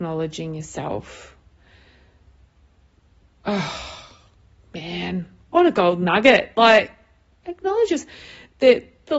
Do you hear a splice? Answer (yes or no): no